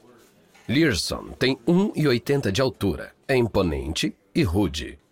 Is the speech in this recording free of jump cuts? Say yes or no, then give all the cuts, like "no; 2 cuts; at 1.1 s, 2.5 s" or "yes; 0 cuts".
yes; 0 cuts